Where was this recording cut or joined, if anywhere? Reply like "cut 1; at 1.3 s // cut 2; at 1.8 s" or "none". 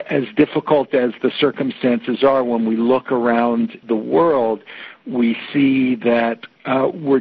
cut 1; at 3.8 s